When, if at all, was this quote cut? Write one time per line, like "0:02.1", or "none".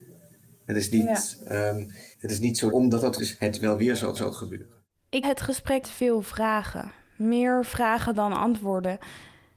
0:02.1
0:02.7
0:03.2
0:04.2
0:05.2
0:05.8